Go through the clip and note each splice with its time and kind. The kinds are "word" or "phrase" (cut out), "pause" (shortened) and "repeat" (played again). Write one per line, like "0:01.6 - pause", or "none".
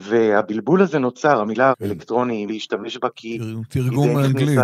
0:01.7 - word
0:02.5 - phrase